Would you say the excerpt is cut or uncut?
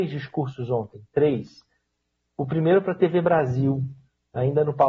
uncut